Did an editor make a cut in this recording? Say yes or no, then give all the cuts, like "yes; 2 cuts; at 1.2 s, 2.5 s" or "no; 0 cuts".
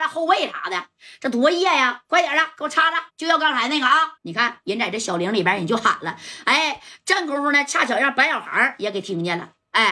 yes; 2 cuts; at 3.1 s, 4.2 s